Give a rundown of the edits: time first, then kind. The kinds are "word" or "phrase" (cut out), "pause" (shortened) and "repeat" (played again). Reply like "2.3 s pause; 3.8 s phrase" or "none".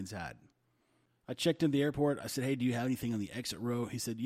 none